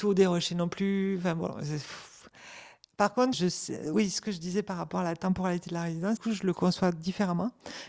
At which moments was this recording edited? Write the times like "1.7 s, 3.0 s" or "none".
3.3 s, 6.2 s